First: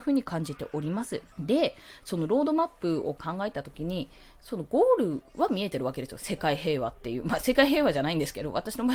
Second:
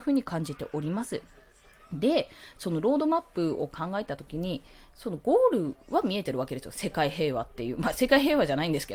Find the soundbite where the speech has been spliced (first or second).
first